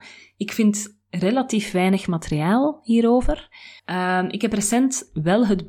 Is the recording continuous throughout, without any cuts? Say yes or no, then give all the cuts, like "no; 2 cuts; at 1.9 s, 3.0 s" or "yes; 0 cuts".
no; 1 cut; at 3.8 s